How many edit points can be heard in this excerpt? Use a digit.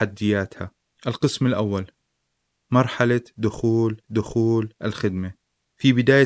1